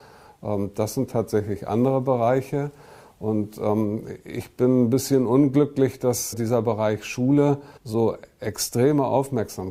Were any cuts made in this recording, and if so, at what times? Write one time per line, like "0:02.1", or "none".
0:06.3
0:07.8